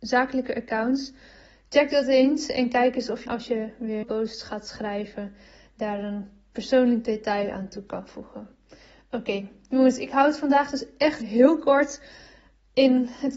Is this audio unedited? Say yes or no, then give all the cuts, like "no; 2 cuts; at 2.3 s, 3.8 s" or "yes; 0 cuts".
no; 3 cuts; at 3.3 s, 4.0 s, 11.2 s